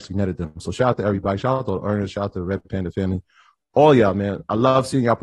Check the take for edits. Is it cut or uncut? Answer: uncut